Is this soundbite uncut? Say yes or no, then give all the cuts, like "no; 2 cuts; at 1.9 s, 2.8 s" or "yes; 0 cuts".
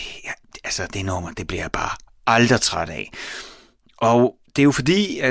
yes; 0 cuts